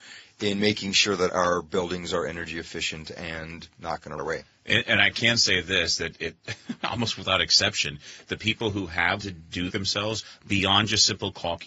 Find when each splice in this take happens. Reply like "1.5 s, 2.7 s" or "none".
1.3 s, 4.2 s, 9.2 s, 9.7 s